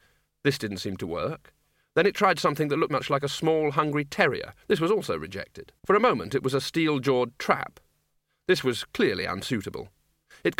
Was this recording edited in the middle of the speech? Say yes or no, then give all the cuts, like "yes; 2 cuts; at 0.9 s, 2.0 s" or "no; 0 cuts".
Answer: yes; 3 cuts; at 2.9 s, 4.6 s, 5.8 s